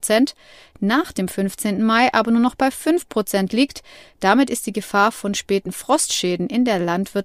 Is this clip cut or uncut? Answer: uncut